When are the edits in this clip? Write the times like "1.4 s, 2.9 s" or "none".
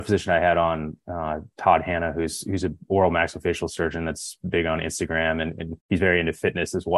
5.8 s